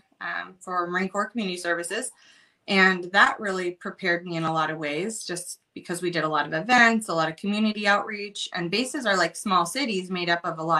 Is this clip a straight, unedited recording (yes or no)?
yes